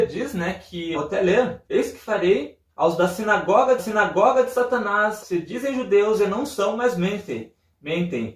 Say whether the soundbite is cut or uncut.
cut